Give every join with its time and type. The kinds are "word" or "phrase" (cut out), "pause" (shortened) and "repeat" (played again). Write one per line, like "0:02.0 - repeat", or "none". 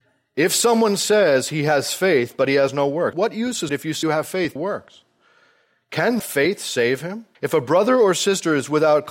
0:03.1 - word
0:03.7 - word
0:04.0 - word
0:04.6 - phrase
0:06.2 - word
0:07.3 - pause